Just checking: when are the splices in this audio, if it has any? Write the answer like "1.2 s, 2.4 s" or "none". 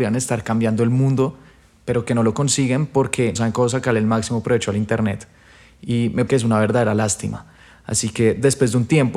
3.4 s, 6.3 s